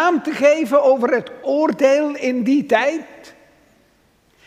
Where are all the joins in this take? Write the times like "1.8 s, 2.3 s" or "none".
1.4 s

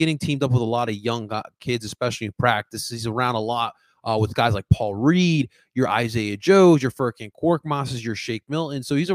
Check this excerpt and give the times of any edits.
none

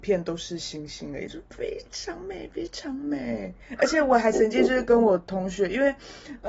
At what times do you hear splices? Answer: 3.6 s

